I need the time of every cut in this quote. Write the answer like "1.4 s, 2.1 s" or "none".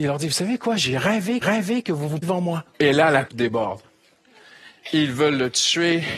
1.4 s, 2.2 s, 2.7 s, 3.3 s